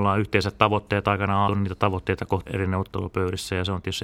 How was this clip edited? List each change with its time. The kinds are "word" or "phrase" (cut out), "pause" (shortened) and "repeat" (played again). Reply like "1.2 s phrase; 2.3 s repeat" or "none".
1.5 s word; 2.5 s word